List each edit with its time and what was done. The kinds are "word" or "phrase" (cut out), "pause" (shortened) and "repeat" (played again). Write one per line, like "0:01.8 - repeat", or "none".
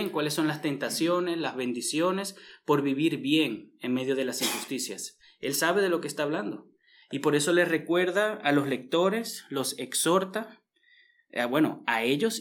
none